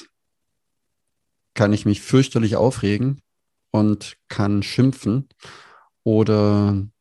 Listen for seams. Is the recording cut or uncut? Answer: uncut